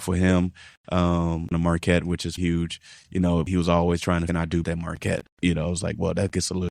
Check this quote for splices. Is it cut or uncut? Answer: cut